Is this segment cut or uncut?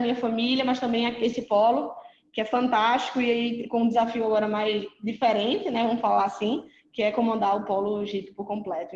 uncut